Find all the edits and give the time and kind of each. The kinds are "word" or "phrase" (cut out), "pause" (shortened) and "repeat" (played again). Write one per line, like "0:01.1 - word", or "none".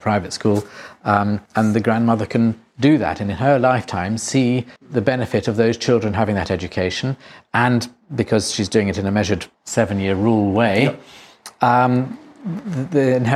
0:01.5 - pause
0:04.8 - pause
0:09.5 - pause